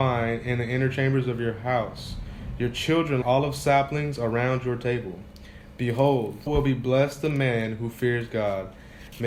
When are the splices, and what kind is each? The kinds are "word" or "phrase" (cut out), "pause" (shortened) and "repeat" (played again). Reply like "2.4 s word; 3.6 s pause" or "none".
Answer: 3.2 s word; 6.5 s word